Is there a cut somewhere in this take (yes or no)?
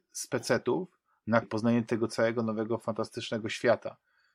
yes